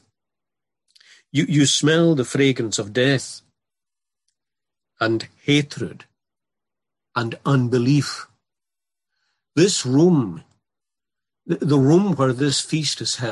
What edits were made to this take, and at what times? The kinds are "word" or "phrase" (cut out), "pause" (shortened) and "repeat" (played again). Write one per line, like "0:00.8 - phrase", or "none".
none